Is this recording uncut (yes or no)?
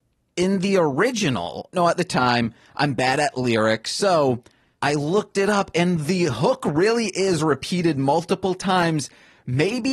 no